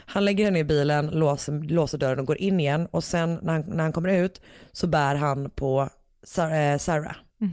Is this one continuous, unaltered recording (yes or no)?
yes